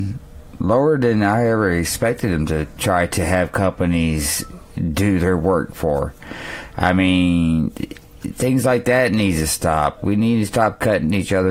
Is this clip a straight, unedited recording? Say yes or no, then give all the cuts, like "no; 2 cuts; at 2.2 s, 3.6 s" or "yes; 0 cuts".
yes; 0 cuts